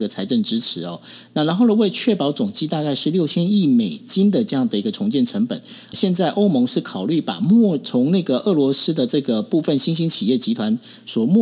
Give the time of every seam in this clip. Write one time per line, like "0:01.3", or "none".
0:05.9